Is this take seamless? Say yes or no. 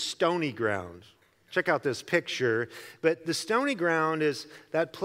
yes